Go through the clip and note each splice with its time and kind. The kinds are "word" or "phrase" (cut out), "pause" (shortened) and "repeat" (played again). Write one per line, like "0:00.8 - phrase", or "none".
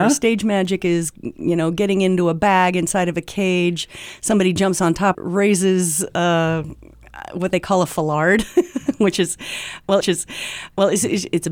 0:05.1 - phrase
0:10.0 - repeat